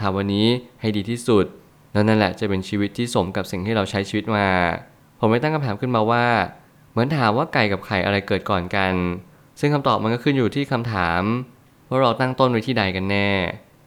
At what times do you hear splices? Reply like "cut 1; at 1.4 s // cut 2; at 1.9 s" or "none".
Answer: none

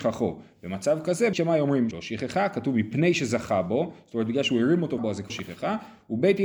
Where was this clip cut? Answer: cut 1; at 1.3 s // cut 2; at 1.9 s // cut 3; at 5.0 s // cut 4; at 5.3 s

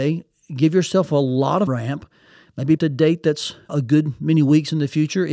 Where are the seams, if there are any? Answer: cut 1; at 1.7 s // cut 2; at 2.8 s // cut 3; at 3.7 s

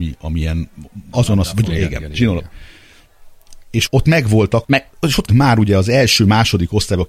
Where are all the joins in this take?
cut 1; at 1.1 s // cut 2; at 1.7 s // cut 3; at 3.9 s // cut 4; at 4.6 s // cut 5; at 5.3 s

